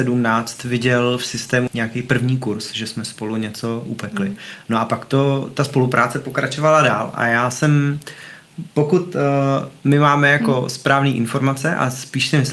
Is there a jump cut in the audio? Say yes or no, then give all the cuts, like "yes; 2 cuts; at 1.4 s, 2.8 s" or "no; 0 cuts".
yes; 2 cuts; at 1.7 s, 8.7 s